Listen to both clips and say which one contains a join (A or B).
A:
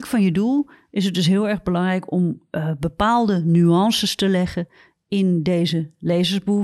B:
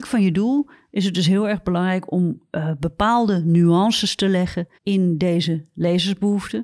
B